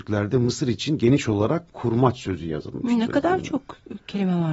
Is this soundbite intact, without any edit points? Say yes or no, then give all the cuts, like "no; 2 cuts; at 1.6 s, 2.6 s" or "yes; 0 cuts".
no; 1 cut; at 1.7 s